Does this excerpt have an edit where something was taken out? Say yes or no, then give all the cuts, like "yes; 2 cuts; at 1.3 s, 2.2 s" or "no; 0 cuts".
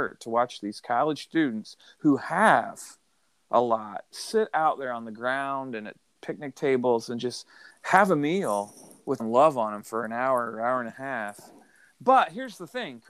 yes; 2 cuts; at 7.7 s, 9.2 s